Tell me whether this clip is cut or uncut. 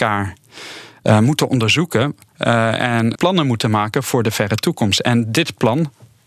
cut